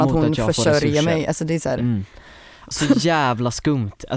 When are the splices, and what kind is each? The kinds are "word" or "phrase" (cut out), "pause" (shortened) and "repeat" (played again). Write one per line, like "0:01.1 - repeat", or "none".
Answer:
0:02.7 - word